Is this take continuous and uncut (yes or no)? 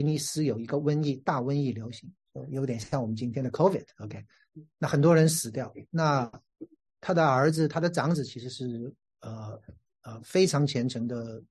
yes